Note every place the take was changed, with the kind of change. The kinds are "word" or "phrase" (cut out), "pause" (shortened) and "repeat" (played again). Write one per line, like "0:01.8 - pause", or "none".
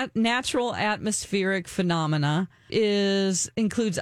0:02.7 - word